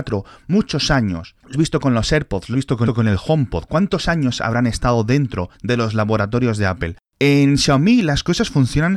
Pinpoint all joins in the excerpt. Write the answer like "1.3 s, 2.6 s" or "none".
1.5 s, 2.5 s, 2.9 s, 5.5 s